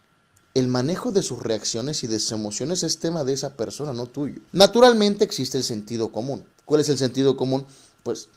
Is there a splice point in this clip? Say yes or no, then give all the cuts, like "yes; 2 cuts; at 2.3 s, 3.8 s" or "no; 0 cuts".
yes; 2 cuts; at 4.5 s, 6.5 s